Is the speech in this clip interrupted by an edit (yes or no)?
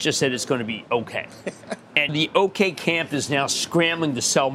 yes